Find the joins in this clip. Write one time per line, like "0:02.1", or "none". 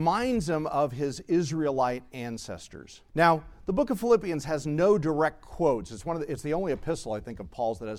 0:03.1